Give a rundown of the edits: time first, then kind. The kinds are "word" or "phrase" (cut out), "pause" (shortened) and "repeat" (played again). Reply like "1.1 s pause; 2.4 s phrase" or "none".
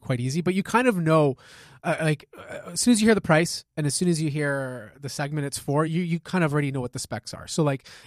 none

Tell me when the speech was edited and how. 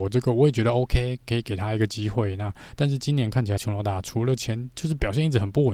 3.6 s word

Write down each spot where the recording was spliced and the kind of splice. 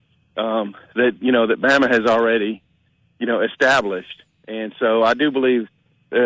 none

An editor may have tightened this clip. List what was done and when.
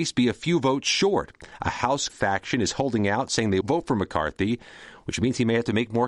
2.1 s word; 3.6 s word

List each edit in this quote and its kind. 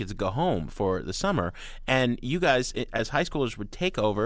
none

